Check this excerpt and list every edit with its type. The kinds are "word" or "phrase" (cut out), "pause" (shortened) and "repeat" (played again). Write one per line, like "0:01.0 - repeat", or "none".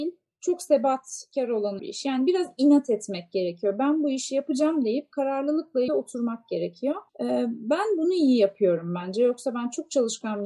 0:01.8 - word
0:05.9 - word
0:07.1 - pause